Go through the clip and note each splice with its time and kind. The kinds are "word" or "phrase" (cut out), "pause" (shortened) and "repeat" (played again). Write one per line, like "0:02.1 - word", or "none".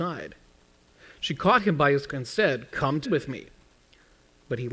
0:02.1 - word
0:03.0 - word